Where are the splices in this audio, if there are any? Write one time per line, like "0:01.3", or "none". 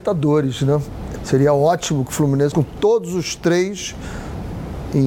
0:01.2
0:02.5

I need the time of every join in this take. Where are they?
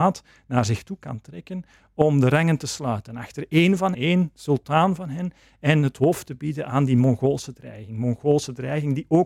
0:03.9

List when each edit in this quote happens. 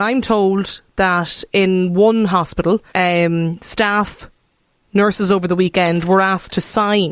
0:02.9

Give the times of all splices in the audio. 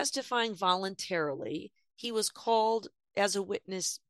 none

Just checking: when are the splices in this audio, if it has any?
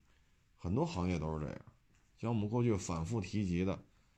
none

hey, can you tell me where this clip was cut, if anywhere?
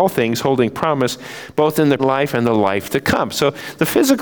0:02.0

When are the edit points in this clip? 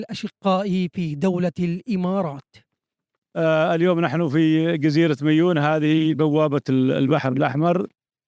none

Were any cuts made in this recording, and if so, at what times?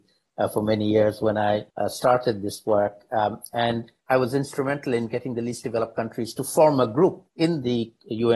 0:01.7
0:04.0
0:07.3

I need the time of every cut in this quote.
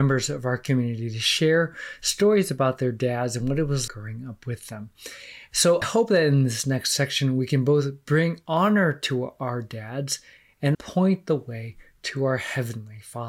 0:03.9
0:05.8
0:10.7

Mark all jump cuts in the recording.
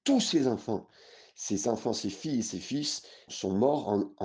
0:03.3

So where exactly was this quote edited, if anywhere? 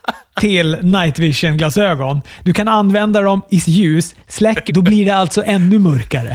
0:03.6
0:04.7

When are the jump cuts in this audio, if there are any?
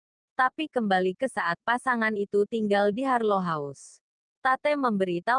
none

